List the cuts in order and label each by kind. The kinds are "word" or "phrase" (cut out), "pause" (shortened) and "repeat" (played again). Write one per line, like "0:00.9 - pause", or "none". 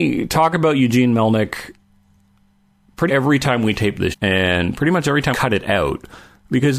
0:03.1 - word
0:04.1 - word
0:05.3 - word